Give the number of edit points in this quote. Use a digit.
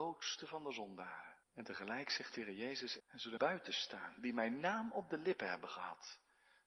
3